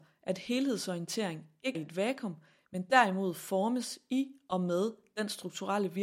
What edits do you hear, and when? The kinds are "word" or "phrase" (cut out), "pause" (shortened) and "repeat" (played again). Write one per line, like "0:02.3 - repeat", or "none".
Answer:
0:01.7 - word

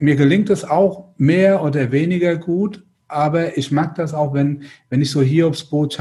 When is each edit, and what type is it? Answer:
none

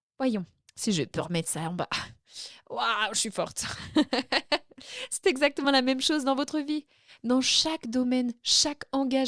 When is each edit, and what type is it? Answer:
none

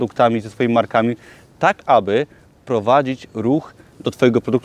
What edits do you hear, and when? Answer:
none

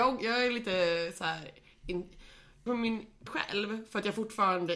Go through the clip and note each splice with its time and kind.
0:02.7 - word
0:03.3 - word

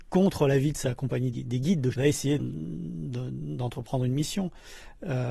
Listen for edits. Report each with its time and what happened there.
0:01.3 - word
0:01.9 - word
0:02.4 - word

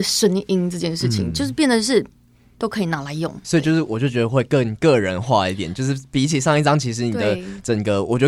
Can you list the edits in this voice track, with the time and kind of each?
0:03.4 - word

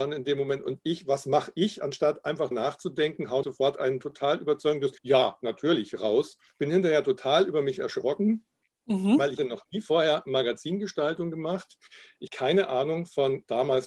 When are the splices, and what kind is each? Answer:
0:02.5 - word
0:03.4 - word
0:05.0 - pause
0:06.5 - pause
0:09.4 - word
0:12.3 - word

